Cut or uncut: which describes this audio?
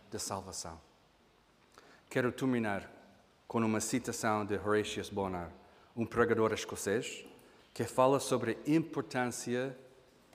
uncut